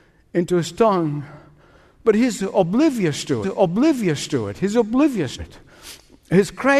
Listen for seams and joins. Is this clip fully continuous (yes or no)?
no